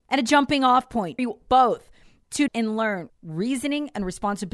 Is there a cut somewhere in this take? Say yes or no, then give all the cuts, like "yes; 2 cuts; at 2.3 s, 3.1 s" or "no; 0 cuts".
yes; 3 cuts; at 1.2 s, 2.5 s, 3.1 s